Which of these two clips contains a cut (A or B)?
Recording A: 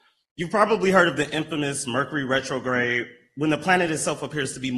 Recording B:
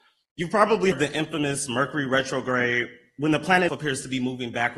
B